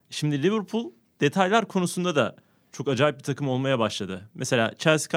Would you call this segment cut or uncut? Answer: uncut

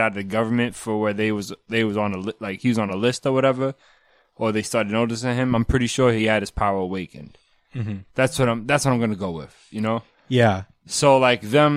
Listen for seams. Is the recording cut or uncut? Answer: uncut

